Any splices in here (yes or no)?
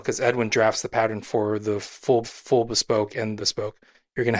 yes